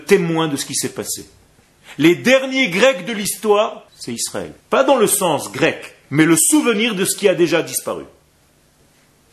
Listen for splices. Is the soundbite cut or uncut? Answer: cut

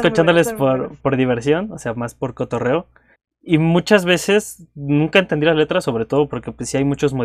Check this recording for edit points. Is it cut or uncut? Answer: cut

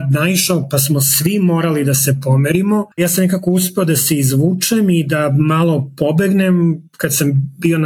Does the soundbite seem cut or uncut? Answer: cut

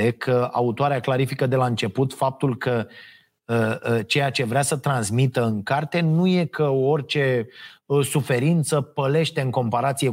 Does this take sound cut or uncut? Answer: uncut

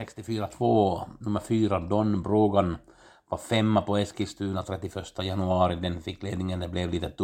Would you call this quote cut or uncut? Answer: uncut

